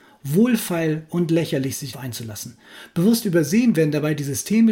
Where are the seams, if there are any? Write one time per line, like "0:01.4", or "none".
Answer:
0:01.9